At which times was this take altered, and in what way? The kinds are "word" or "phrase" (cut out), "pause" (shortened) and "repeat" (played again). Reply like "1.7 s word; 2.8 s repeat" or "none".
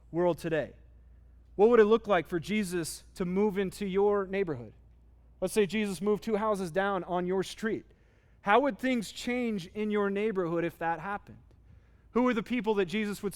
none

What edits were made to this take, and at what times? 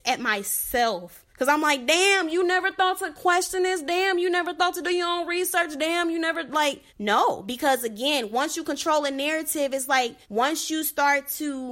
1.3 s pause; 6.9 s pause; 10.2 s pause

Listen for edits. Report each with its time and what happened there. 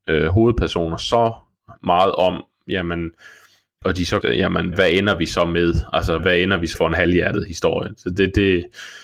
3.8 s word; 4.2 s phrase; 4.7 s word; 6.2 s word; 6.7 s word

